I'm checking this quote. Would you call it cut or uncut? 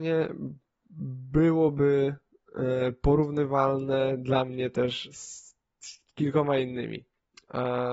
uncut